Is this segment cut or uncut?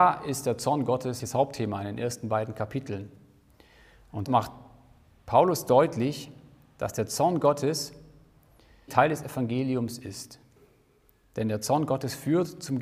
cut